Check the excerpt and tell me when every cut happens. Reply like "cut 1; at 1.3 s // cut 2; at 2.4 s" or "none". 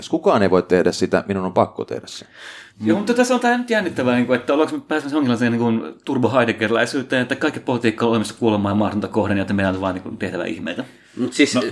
cut 1; at 2.7 s